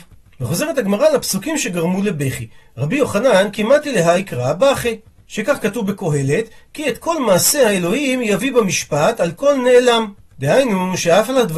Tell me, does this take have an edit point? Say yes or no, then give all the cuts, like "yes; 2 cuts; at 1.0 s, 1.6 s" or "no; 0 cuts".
no; 0 cuts